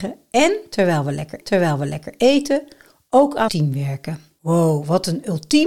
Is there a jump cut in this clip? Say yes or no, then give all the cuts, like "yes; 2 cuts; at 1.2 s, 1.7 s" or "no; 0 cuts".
yes; 2 cuts; at 1.4 s, 3.5 s